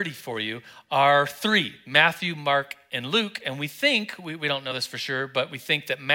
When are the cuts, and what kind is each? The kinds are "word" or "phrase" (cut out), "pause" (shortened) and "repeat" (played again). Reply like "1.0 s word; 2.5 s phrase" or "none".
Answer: none